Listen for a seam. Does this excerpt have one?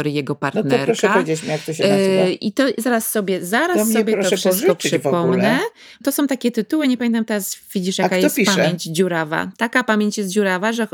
no; 0 cuts

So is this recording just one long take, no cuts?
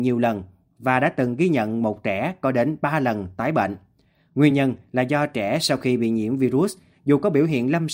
yes; 0 cuts

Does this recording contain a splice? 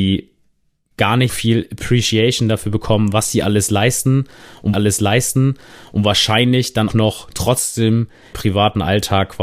yes; 4 cuts; at 1.3 s, 4.7 s, 6.9 s, 8.3 s

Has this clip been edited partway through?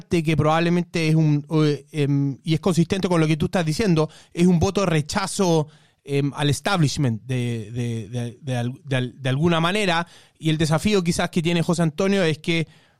no; 0 cuts

